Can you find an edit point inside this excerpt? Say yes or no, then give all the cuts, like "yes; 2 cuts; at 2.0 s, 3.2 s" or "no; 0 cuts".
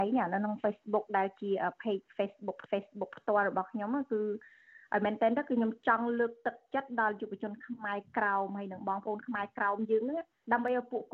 yes; 1 cut; at 2.7 s